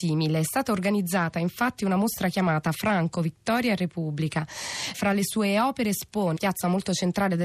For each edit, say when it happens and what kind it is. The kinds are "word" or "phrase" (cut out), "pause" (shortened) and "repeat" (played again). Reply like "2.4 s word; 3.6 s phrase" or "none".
4.9 s word; 6.4 s phrase

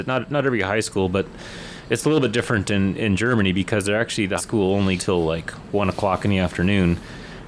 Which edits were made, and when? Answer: 4.4 s word; 5.0 s word

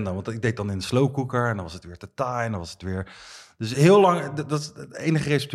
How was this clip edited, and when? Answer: none

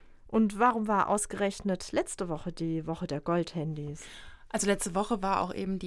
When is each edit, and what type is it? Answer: none

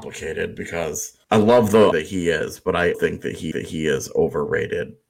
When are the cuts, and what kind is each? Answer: 1.2 s pause; 1.9 s phrase; 2.9 s word; 3.5 s repeat

